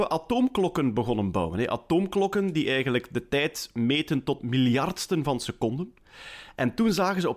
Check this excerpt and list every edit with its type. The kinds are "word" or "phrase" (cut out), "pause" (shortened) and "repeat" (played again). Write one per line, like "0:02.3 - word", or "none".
0:04.4 - word